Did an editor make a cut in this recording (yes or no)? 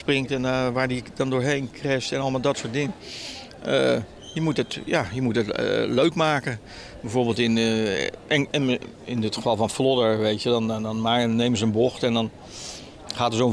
no